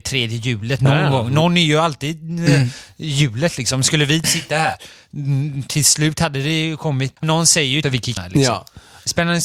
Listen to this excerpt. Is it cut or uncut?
cut